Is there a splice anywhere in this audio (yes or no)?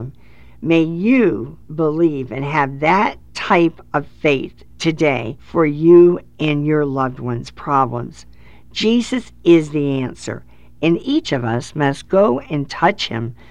no